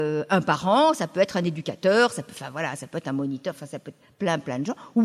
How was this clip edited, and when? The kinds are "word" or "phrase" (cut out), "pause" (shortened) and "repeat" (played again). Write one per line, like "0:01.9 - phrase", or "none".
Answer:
none